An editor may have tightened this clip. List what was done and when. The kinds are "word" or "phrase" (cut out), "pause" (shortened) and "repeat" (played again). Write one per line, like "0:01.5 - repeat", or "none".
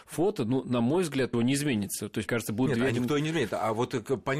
0:01.3 - word
0:02.3 - word

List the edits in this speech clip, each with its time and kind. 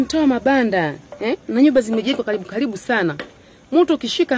none

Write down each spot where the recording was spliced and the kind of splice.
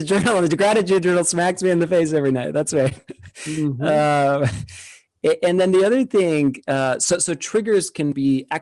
none

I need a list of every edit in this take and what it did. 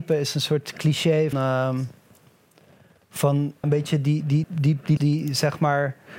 0:01.3 - word
0:03.6 - word
0:04.4 - word
0:05.0 - word

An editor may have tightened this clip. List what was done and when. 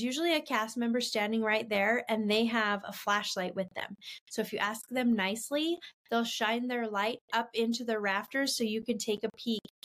none

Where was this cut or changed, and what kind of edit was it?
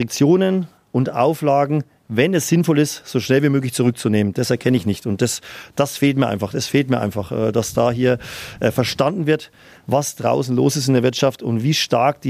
none

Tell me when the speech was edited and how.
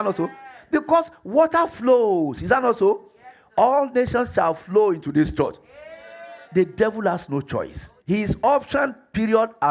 0:06.4 - pause
0:08.0 - pause

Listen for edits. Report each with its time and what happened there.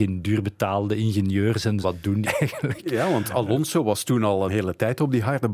0:01.8 - word
0:02.2 - word
0:04.5 - word

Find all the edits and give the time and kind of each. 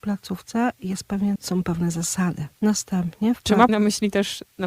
0:01.4 - word
0:03.7 - word

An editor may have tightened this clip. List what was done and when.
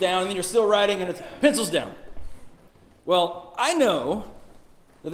0:02.7 - pause

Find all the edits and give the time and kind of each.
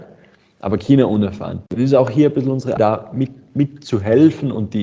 0:01.7 - pause
0:02.8 - word

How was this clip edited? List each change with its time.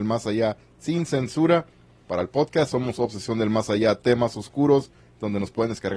none

